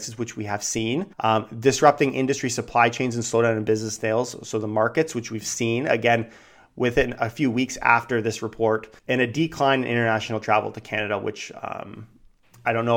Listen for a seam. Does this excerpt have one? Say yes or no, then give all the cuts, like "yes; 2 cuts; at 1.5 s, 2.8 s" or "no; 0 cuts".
yes; 2 cuts; at 1.1 s, 9.0 s